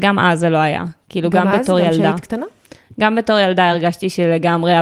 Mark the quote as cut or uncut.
uncut